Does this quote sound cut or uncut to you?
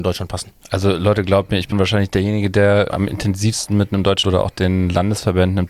cut